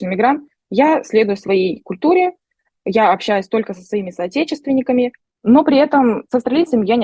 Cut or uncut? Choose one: uncut